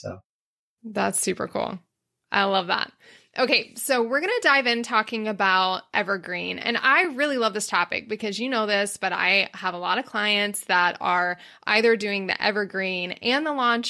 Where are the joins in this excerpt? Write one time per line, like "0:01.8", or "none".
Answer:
none

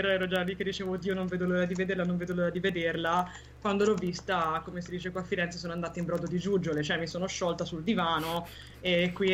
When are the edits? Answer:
none

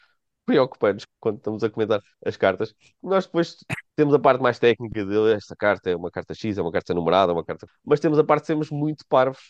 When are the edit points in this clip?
0:01.0
0:02.1
0:03.9
0:07.7

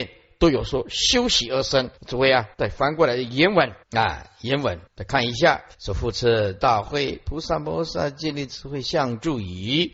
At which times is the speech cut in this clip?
0:02.0
0:02.5
0:03.8
0:04.9
0:05.7

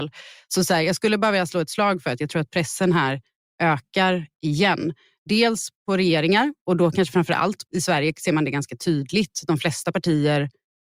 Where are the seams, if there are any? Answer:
0:07.7

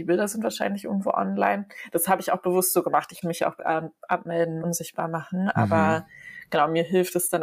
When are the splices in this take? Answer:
0:03.2
0:03.6
0:04.6

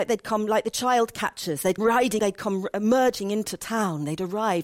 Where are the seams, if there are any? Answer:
0:01.8
0:02.2

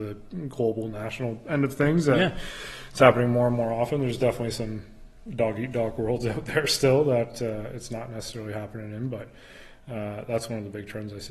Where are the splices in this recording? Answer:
none

